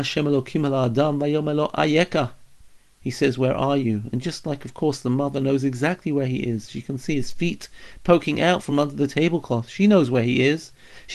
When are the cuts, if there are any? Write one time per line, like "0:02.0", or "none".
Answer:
none

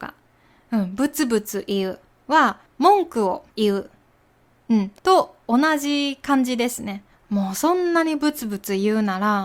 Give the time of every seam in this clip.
0:02.7
0:03.5
0:05.0
0:07.1

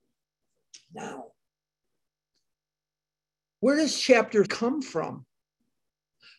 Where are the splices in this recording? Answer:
0:04.5

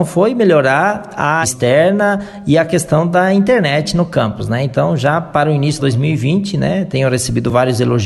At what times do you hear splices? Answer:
0:01.4
0:05.8

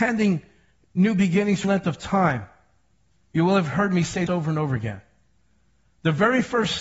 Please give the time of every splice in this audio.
0:01.6
0:04.3

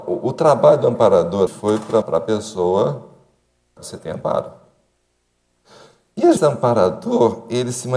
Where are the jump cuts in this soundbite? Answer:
0:01.5
0:02.0
0:03.8
0:06.4

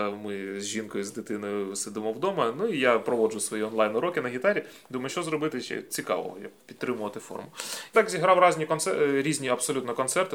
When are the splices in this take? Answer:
0:05.1
0:05.9
0:07.9

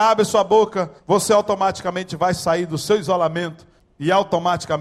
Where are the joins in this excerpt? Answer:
0:01.0
0:03.8

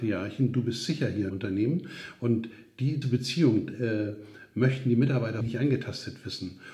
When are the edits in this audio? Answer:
0:01.3
0:03.0
0:05.4

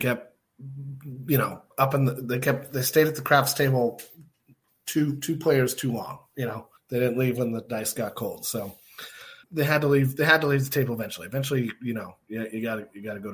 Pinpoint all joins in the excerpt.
0:01.7
0:06.8
0:09.4

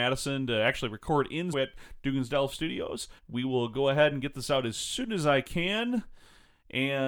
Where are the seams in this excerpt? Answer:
0:01.5
0:03.2

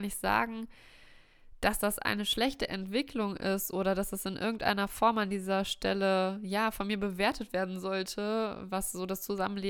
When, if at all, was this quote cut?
none

